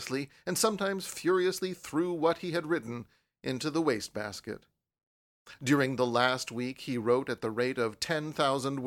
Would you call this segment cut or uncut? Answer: uncut